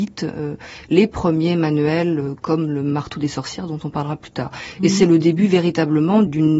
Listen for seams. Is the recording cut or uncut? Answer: uncut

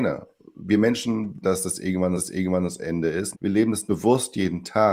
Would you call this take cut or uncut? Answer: cut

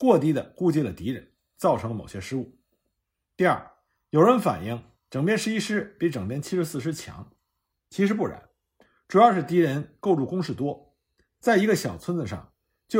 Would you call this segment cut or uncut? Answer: uncut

